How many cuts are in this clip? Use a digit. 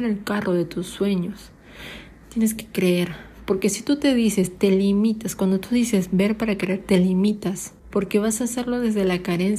1